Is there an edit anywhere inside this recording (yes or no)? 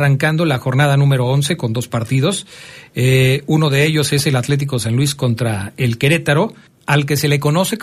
yes